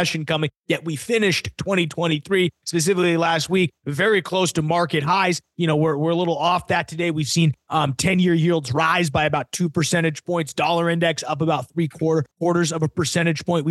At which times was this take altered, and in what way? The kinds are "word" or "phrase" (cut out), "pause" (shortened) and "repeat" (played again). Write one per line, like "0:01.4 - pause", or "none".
0:12.3 - pause